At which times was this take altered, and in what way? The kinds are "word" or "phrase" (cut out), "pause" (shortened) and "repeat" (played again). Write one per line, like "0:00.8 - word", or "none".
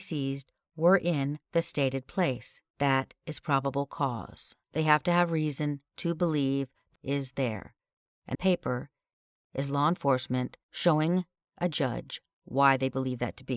0:02.7 - pause
0:04.6 - pause
0:07.0 - phrase
0:08.3 - word